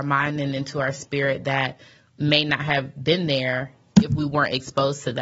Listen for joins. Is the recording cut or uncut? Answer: uncut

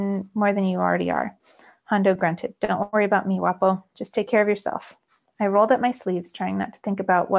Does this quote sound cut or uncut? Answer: uncut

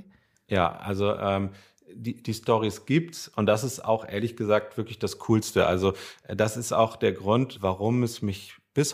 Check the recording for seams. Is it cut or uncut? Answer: uncut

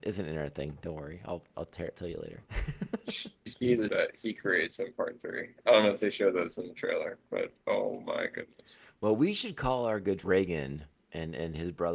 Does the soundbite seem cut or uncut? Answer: cut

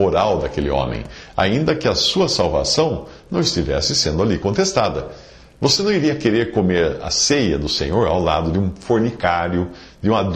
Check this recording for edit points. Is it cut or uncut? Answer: uncut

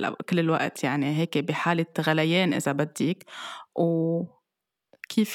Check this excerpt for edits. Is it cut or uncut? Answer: uncut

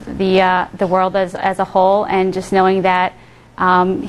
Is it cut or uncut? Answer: uncut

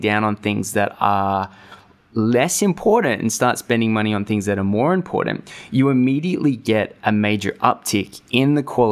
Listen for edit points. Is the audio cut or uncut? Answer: uncut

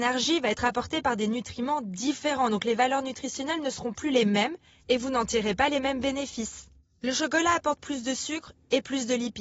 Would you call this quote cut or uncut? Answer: uncut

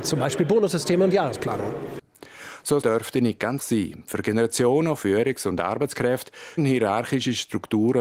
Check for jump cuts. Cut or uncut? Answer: cut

